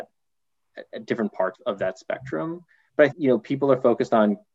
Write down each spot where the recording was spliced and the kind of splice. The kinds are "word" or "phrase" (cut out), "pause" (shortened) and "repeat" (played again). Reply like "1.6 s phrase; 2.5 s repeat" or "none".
1.5 s word; 3.1 s word